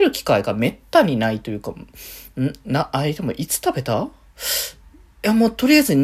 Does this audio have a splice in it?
yes; 1 cut; at 5.1 s

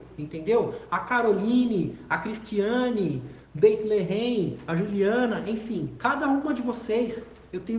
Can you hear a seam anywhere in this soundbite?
no; 0 cuts

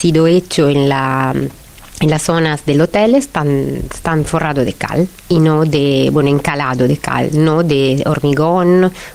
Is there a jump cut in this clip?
no; 0 cuts

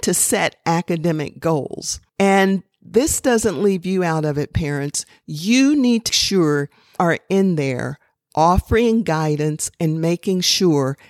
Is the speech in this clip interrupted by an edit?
yes; 3 cuts; at 2.1 s, 6.1 s, 7.0 s

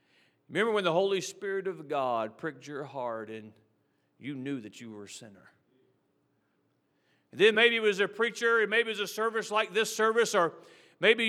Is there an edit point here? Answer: no; 0 cuts

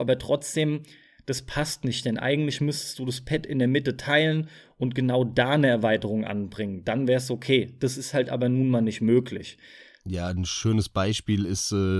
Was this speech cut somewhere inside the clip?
no; 0 cuts

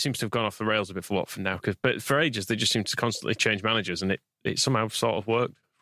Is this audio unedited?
yes; 0 cuts

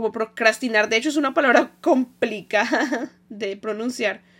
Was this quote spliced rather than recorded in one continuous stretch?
no; 0 cuts

